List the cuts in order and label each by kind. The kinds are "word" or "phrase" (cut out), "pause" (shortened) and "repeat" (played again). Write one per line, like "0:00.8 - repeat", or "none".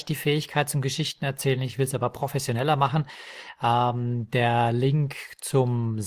none